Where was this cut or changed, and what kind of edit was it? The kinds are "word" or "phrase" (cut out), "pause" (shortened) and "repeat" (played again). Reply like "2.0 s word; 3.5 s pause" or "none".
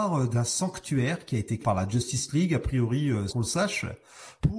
1.6 s word; 3.3 s word